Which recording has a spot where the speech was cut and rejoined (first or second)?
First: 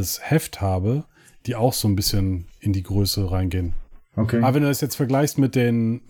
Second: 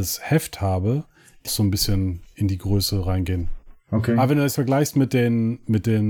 second